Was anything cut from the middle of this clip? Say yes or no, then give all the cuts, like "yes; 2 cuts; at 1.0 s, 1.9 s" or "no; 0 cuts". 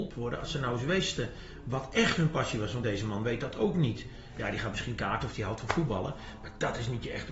no; 0 cuts